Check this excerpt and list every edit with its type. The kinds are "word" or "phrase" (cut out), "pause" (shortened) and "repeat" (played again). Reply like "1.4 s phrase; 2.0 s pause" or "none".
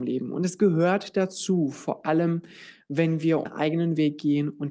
3.5 s word